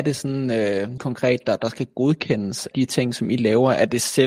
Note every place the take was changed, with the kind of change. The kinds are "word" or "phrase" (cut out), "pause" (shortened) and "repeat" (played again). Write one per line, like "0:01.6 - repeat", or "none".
0:01.0 - word
0:02.7 - word